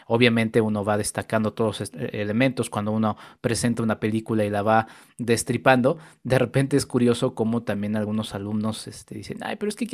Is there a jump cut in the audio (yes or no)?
no